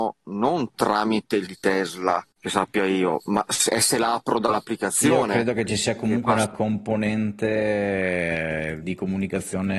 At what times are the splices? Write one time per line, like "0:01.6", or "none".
0:01.5
0:02.3
0:08.8